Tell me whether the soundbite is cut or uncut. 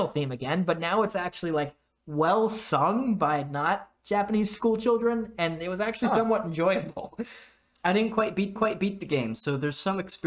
cut